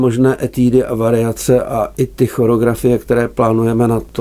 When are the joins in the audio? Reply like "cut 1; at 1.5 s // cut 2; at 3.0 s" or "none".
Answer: none